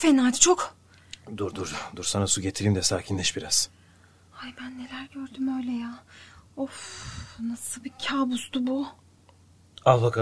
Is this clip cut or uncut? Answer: uncut